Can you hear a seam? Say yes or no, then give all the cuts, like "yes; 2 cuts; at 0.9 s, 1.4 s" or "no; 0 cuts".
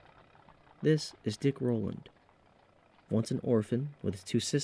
no; 0 cuts